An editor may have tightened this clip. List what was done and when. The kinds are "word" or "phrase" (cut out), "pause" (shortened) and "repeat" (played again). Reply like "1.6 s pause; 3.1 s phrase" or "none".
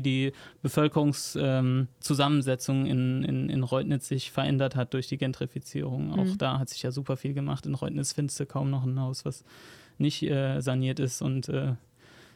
none